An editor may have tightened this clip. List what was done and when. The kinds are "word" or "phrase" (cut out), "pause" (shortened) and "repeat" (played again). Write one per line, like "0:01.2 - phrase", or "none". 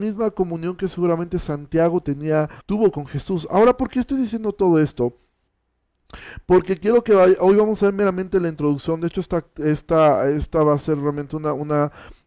0:02.6 - pause